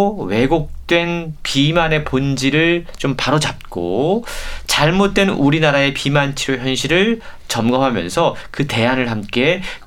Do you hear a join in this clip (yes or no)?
no